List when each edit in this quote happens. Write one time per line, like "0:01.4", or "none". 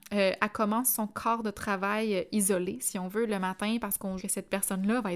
0:04.2